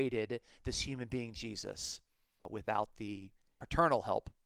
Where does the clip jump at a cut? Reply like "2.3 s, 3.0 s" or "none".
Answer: none